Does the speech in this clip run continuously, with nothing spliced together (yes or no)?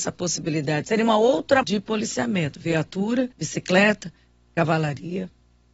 no